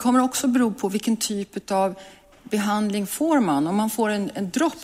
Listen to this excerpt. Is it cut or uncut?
uncut